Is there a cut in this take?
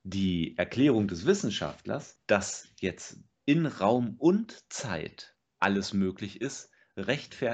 no; 0 cuts

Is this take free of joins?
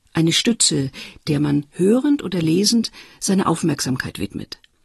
yes; 0 cuts

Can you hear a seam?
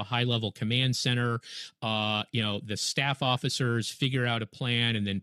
no; 0 cuts

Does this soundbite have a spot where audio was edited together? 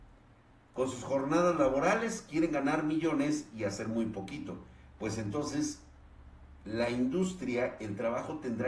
no; 0 cuts

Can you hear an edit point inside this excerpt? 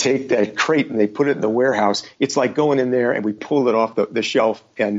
no; 0 cuts

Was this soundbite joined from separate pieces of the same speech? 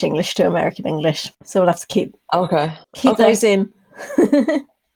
yes; 2 cuts; at 1.3 s, 2.8 s

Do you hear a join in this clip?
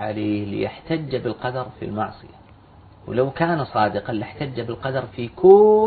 no; 0 cuts

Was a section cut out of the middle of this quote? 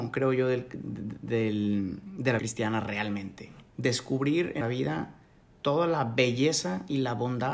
yes; 3 cuts; at 2.4 s, 3.7 s, 4.6 s

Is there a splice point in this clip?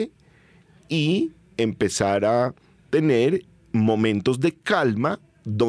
no; 0 cuts

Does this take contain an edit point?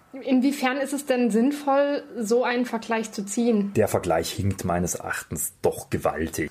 no; 0 cuts

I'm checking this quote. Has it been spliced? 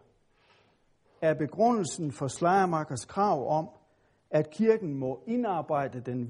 no; 0 cuts

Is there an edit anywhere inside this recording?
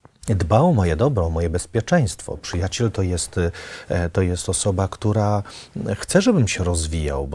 no; 0 cuts

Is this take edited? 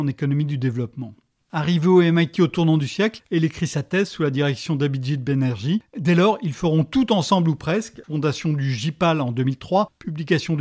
no; 0 cuts

